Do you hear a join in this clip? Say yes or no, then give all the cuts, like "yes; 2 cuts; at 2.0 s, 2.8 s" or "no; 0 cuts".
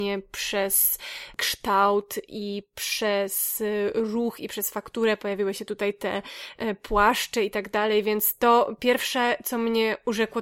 no; 0 cuts